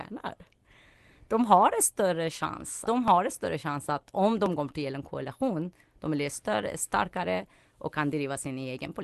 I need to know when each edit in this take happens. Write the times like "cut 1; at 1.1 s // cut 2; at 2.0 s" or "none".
cut 1; at 2.9 s